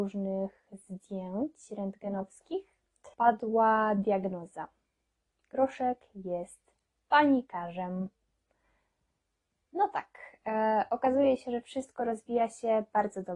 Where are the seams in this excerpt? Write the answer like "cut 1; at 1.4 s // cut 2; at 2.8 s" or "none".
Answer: cut 1; at 3.1 s

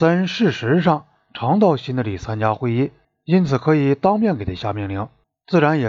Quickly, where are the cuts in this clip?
none

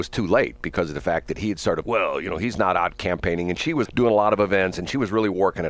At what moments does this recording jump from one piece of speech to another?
cut 1; at 1.8 s // cut 2; at 3.9 s

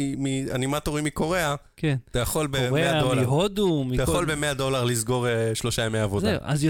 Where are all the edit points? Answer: none

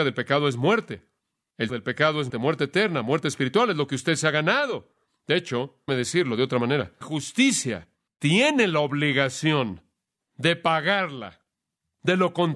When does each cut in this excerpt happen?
cut 1; at 1.7 s // cut 2; at 2.3 s // cut 3; at 5.9 s // cut 4; at 7.0 s

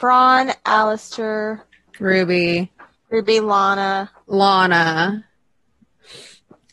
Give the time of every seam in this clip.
cut 1; at 3.0 s

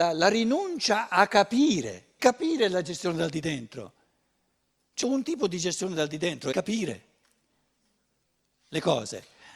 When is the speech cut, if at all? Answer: cut 1; at 2.2 s // cut 2; at 5.0 s // cut 3; at 6.5 s

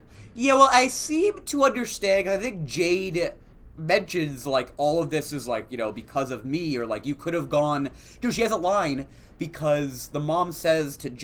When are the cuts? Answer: none

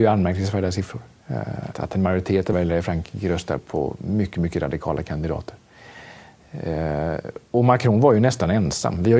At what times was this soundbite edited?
cut 1; at 1.7 s // cut 2; at 2.5 s // cut 3; at 3.6 s // cut 4; at 7.5 s

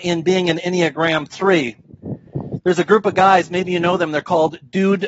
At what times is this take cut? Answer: none

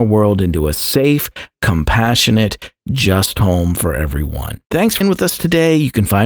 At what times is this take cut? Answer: cut 1; at 4.6 s // cut 2; at 5.0 s

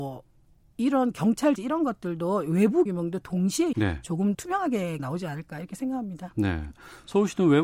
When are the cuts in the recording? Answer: cut 1; at 1.6 s // cut 2; at 2.9 s // cut 3; at 3.7 s // cut 4; at 4.3 s // cut 5; at 5.0 s

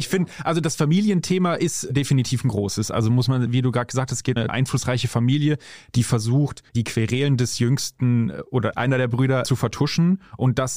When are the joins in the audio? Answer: cut 1; at 4.4 s // cut 2; at 6.7 s

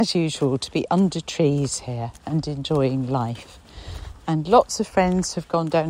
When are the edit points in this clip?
none

